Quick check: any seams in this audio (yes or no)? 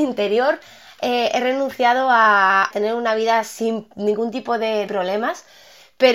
yes